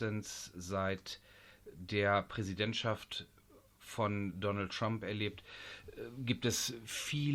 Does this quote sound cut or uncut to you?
uncut